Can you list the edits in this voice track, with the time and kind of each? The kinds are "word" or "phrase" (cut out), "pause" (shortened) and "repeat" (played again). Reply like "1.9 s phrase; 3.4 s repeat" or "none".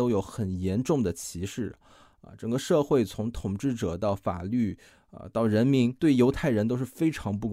none